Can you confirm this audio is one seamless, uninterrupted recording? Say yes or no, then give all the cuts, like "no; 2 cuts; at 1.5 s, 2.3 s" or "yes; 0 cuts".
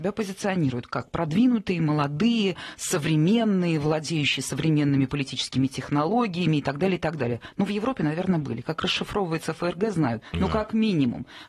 yes; 0 cuts